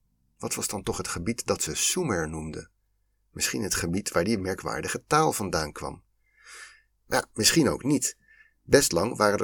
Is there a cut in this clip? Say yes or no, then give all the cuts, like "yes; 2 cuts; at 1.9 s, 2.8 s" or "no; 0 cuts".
no; 0 cuts